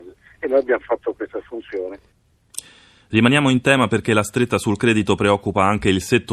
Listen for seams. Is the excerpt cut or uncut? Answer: uncut